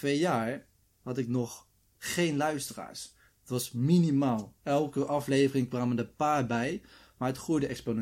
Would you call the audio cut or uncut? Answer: uncut